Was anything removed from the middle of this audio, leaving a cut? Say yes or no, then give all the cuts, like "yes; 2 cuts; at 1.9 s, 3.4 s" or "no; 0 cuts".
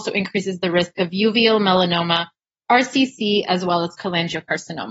no; 0 cuts